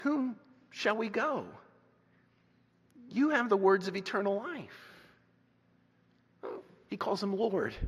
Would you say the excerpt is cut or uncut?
uncut